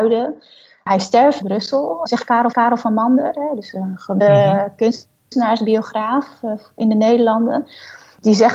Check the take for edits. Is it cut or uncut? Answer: cut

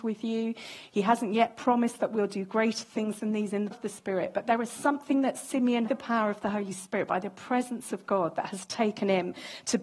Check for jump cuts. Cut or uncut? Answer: cut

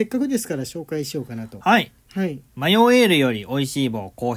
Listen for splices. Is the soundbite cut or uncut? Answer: cut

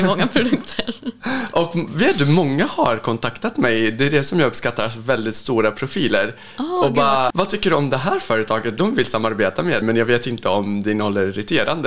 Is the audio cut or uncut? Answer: cut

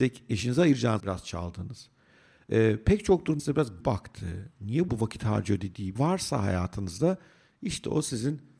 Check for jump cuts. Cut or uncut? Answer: cut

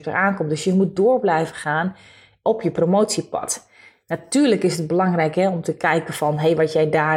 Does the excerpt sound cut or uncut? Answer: uncut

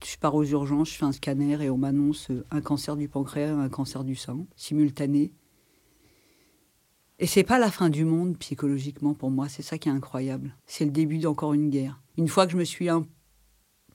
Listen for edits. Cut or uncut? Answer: cut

